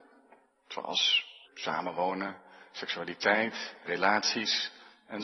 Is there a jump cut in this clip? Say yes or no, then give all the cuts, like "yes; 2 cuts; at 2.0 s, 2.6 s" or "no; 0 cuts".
yes; 2 cuts; at 1.4 s, 3.9 s